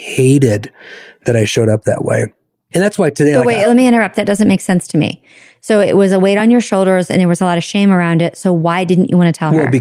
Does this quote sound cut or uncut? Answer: uncut